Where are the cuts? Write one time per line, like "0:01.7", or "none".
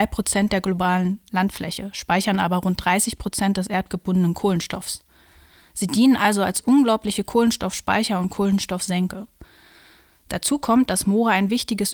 none